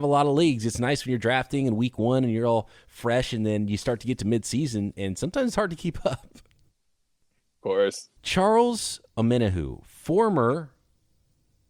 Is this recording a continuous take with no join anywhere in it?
no; 1 cut; at 8.2 s

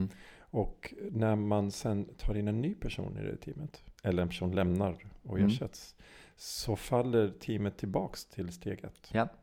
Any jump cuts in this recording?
yes; 1 cut; at 4.0 s

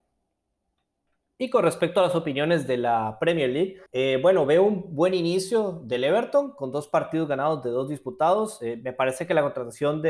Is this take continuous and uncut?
no; 1 cut; at 3.9 s

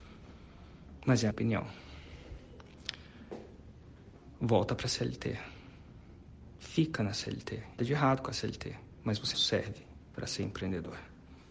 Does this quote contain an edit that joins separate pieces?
yes; 3 cuts; at 1.3 s, 7.8 s, 9.3 s

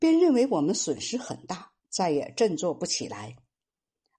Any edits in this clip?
yes; 1 cut; at 1.8 s

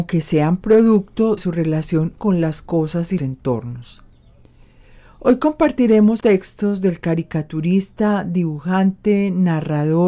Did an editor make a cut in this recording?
yes; 4 cuts; at 1.4 s, 2.2 s, 3.2 s, 6.2 s

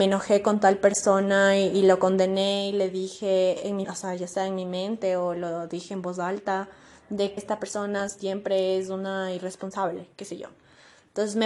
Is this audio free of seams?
no; 2 cuts; at 3.8 s, 7.4 s

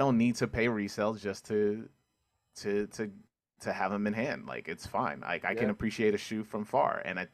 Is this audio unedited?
yes; 0 cuts

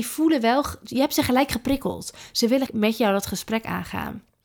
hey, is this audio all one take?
no; 1 cut; at 2.7 s

